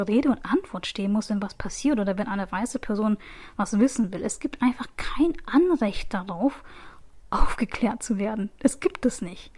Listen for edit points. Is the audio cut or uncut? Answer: uncut